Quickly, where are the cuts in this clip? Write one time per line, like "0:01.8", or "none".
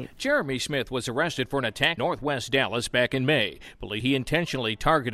0:02.0
0:04.0